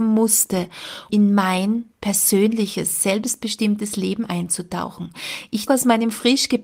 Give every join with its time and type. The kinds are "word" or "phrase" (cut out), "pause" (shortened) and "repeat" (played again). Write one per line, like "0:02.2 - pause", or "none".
0:01.1 - word
0:01.9 - pause
0:05.7 - word